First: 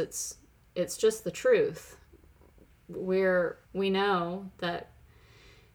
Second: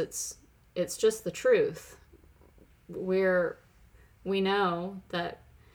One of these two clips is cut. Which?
first; 1 cut; at 3.6 s

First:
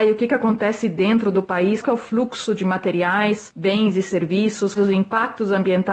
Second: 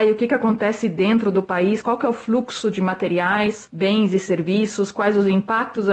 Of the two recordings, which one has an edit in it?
first; 2 cuts; at 1.8 s, 4.8 s

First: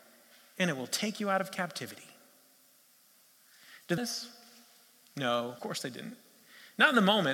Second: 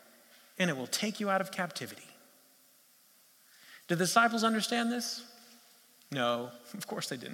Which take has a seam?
first; 2 cuts; at 4.0 s, 5.6 s

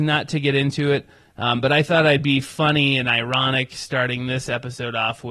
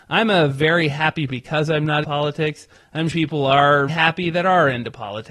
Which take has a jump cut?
second; 4 cuts; at 1.3 s, 2.0 s, 3.1 s, 3.9 s

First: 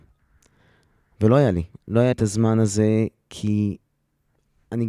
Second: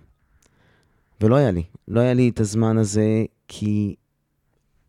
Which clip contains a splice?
first; 1 cut; at 2.1 s

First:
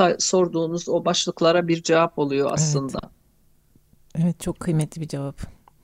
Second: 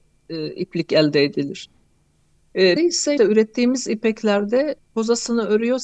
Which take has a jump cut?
second; 3 cuts; at 2.8 s, 3.2 s, 4.8 s

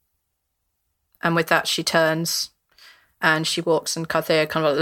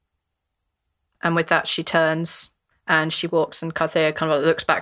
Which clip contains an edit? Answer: second; 1 cut; at 2.7 s

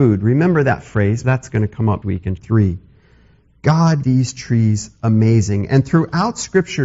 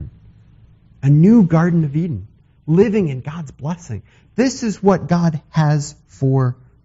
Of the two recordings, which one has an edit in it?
first; 4 cuts; at 1.2 s, 2.0 s, 2.4 s, 4.0 s

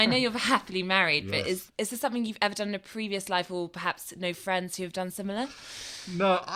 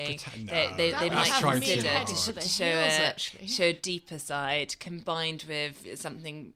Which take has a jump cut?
first; 1 cut; at 1.7 s

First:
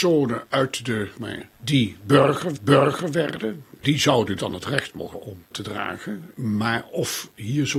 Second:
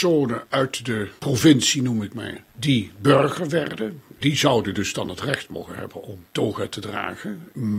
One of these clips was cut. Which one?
first; 5 cuts; at 1.2 s, 2.6 s, 4.4 s, 5.1 s, 5.5 s

